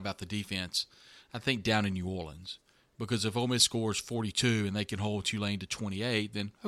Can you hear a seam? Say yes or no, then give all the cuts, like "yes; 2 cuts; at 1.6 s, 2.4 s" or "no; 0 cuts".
no; 0 cuts